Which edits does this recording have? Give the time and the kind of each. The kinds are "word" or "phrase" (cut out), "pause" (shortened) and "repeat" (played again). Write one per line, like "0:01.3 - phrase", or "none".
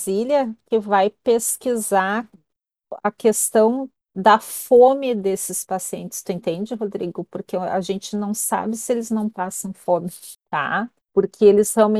0:10.4 - pause

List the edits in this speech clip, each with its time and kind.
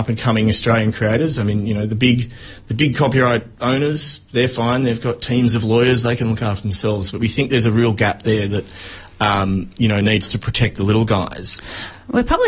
0:03.5 - pause

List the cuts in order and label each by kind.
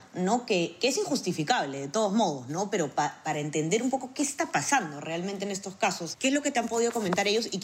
none

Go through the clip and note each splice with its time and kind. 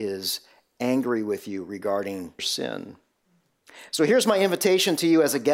0:02.4 - word

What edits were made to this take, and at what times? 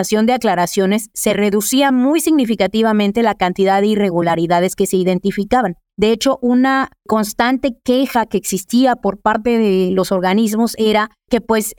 none

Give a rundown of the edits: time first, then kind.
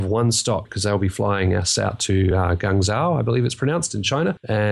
none

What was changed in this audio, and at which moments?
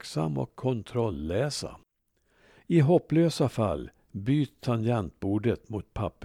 none

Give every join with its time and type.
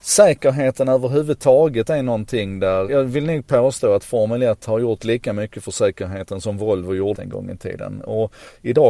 0:02.9 - word
0:07.1 - phrase

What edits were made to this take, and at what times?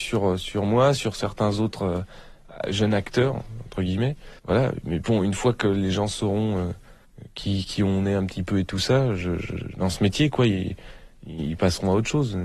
0:04.4 - pause

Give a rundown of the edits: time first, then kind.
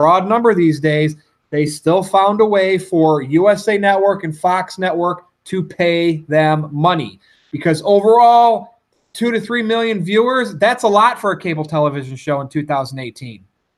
none

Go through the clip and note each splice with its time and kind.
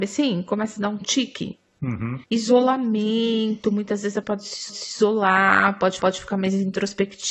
0:02.2 - pause
0:04.2 - word
0:04.7 - repeat
0:06.0 - repeat

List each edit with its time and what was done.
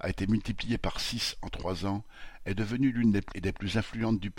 0:03.3 - word

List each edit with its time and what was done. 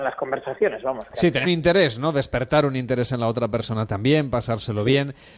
0:01.4 - word

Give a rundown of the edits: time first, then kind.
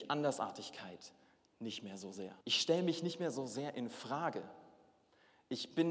0:02.4 - pause

